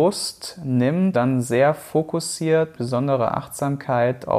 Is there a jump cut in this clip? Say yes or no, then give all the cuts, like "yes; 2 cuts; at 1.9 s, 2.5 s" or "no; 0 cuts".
yes; 2 cuts; at 1.1 s, 2.7 s